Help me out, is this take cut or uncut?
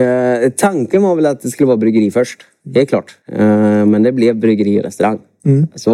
cut